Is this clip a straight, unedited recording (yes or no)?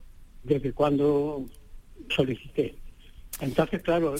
no